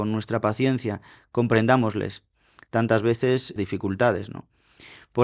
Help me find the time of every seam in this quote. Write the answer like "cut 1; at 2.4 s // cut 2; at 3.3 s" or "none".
cut 1; at 3.6 s